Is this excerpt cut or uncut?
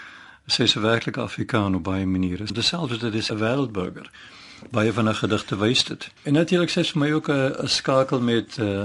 cut